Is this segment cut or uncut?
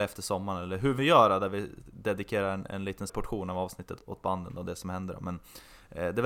cut